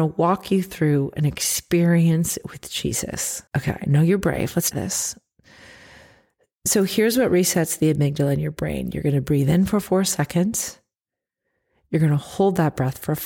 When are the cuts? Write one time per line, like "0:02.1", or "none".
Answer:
0:03.5
0:04.7